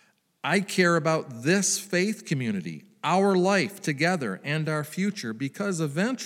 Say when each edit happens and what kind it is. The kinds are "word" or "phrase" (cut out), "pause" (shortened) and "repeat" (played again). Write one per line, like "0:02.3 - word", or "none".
none